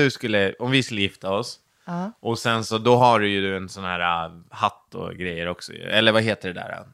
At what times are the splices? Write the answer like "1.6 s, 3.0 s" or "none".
none